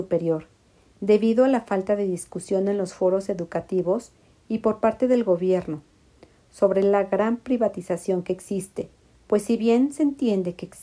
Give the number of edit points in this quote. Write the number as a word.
zero